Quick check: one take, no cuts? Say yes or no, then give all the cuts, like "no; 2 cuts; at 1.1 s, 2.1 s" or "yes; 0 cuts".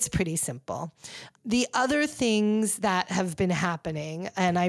yes; 0 cuts